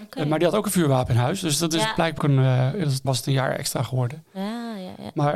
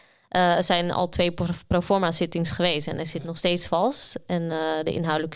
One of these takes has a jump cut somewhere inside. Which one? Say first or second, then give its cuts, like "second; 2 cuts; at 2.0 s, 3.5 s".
first; 2 cuts; at 2.2 s, 3.0 s